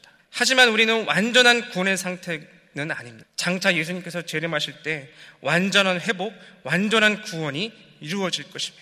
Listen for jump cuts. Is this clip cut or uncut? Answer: uncut